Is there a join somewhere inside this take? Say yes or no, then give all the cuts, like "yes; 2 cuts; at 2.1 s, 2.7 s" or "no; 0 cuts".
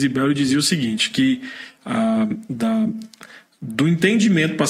no; 0 cuts